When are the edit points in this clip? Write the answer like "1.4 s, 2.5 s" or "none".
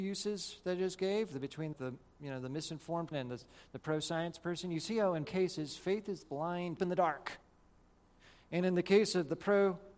1.7 s, 3.1 s, 5.2 s, 6.2 s, 6.8 s